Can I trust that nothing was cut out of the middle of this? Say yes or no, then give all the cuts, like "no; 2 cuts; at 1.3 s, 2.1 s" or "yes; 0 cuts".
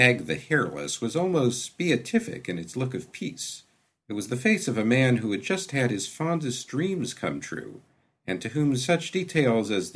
yes; 0 cuts